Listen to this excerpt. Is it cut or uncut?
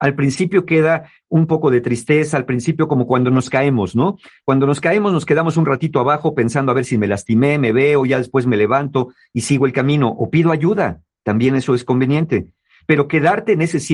uncut